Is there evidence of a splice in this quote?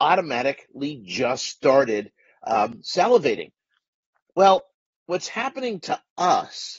no; 0 cuts

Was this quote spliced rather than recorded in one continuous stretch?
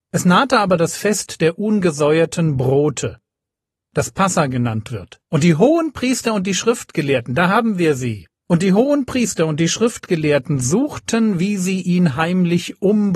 yes; 2 cuts; at 5.2 s, 8.3 s

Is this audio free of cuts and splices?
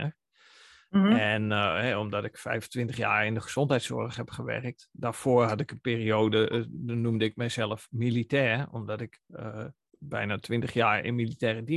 yes; 0 cuts

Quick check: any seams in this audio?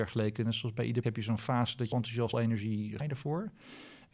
yes; 4 cuts; at 1.0 s, 1.9 s, 2.3 s, 3.0 s

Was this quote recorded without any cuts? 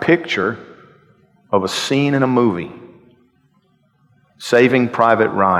yes; 0 cuts

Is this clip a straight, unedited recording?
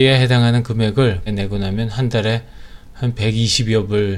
no; 1 cut; at 1.3 s

